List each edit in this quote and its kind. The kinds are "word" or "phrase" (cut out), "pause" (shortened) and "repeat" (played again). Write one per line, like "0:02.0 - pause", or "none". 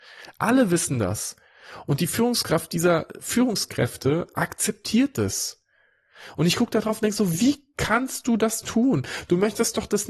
none